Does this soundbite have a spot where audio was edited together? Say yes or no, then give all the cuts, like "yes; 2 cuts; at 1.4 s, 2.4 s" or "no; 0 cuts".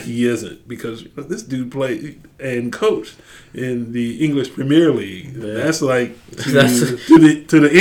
no; 0 cuts